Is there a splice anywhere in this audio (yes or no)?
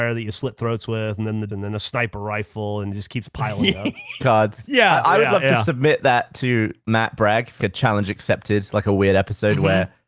yes